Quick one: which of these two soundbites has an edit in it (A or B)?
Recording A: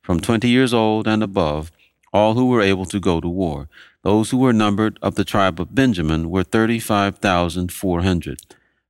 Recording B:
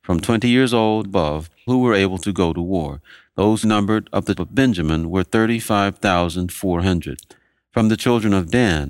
B